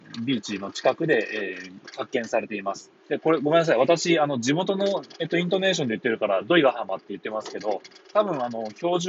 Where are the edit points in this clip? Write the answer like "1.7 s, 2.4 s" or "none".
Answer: 3.0 s